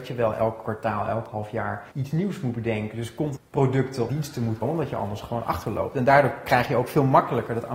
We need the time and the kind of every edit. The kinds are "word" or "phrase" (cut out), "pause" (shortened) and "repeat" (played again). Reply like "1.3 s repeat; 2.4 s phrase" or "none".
1.9 s pause; 3.4 s phrase; 4.1 s phrase; 4.6 s word